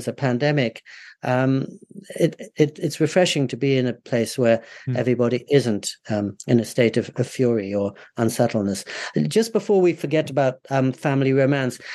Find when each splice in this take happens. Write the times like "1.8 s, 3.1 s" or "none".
7.1 s